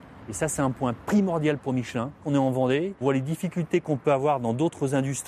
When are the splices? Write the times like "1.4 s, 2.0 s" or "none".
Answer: 3.0 s